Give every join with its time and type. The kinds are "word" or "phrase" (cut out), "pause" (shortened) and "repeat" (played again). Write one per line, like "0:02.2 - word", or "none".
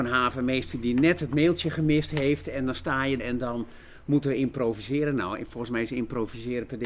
0:03.2 - word